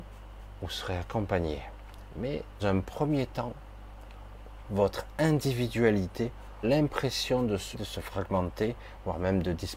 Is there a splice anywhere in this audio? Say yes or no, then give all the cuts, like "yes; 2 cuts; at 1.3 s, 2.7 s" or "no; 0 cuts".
yes; 3 cuts; at 2.6 s, 6.6 s, 7.7 s